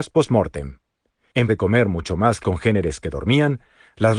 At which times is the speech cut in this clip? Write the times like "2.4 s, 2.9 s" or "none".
1.5 s, 2.4 s